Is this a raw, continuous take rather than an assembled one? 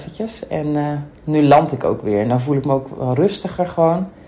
no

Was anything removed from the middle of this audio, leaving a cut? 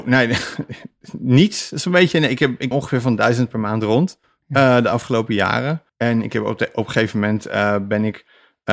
yes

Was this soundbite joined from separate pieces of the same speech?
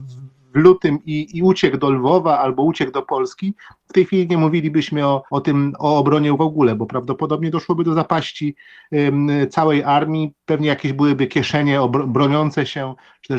yes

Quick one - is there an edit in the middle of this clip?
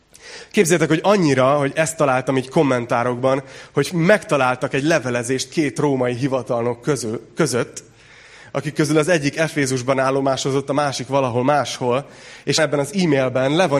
yes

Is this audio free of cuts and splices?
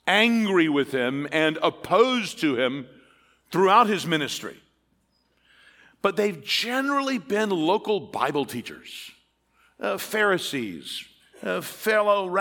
yes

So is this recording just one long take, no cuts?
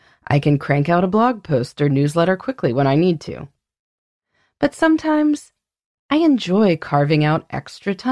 yes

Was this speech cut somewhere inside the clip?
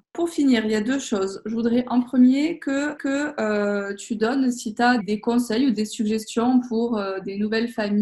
yes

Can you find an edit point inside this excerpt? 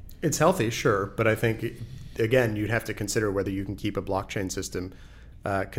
no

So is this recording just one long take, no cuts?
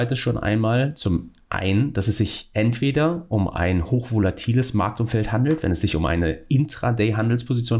yes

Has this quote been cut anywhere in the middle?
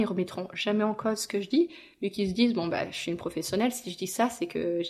no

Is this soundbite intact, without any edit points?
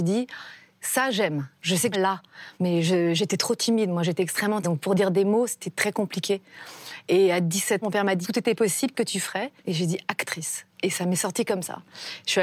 no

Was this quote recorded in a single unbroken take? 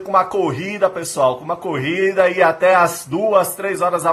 yes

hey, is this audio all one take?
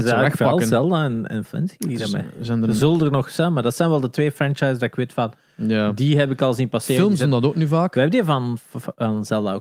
no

